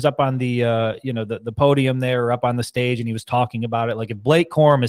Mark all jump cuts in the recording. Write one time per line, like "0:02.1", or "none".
none